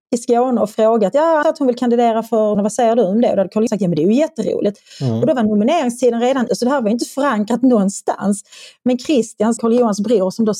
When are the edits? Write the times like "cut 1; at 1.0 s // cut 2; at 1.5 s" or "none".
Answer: cut 1; at 1.4 s // cut 2; at 2.5 s // cut 3; at 3.7 s // cut 4; at 6.5 s // cut 5; at 9.6 s